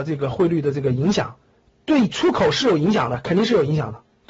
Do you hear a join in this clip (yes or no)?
no